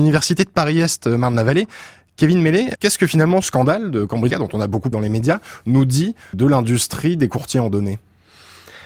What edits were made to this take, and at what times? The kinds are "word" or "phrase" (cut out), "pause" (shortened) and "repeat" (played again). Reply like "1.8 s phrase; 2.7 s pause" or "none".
2.8 s word; 3.4 s word; 4.3 s word; 4.9 s word; 6.3 s word